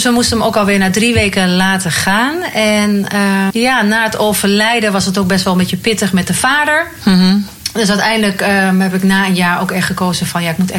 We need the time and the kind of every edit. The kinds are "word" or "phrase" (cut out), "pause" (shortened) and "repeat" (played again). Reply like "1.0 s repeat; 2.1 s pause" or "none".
3.5 s word